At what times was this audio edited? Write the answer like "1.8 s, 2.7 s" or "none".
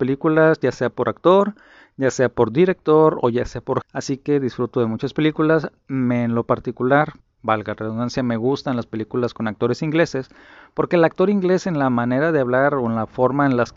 3.8 s, 7.2 s